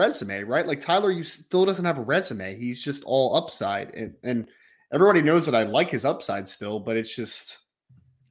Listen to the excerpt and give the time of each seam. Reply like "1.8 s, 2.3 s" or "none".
none